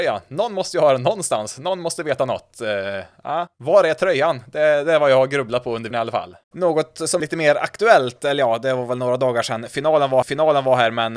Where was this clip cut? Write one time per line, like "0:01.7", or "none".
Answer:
0:03.5
0:05.9
0:06.4
0:07.2
0:10.2